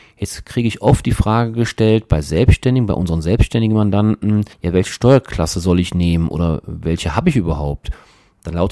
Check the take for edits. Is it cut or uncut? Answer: cut